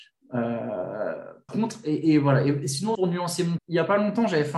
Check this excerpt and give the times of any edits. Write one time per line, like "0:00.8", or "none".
0:01.5
0:02.9
0:03.6